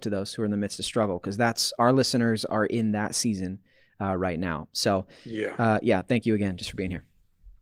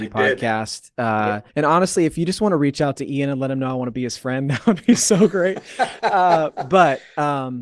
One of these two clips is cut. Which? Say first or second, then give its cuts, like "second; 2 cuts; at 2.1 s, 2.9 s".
second; 1 cut; at 1.5 s